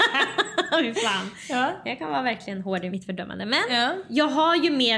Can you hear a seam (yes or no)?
no